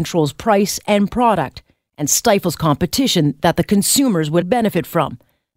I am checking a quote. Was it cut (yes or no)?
yes